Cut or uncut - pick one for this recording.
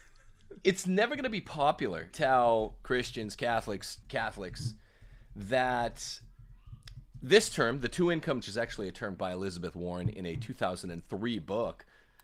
cut